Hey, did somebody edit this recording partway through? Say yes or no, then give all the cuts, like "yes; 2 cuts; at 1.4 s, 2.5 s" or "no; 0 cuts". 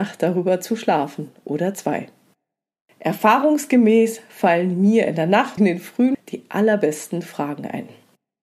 yes; 2 cuts; at 5.6 s, 6.1 s